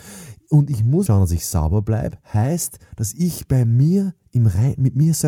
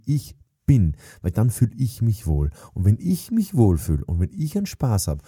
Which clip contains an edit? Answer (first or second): first